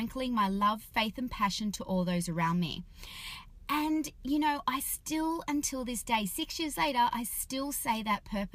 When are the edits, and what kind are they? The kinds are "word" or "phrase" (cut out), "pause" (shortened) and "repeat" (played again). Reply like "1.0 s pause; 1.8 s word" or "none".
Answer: none